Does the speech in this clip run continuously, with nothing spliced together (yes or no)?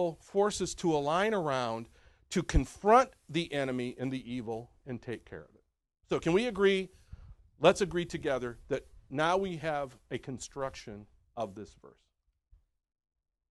yes